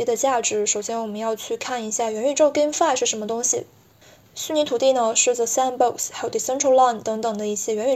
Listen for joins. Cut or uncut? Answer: uncut